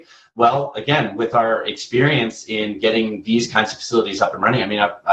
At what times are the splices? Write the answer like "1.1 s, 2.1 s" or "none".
none